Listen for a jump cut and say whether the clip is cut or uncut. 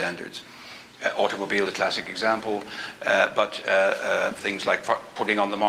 cut